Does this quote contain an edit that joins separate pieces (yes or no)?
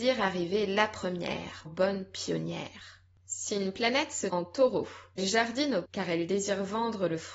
yes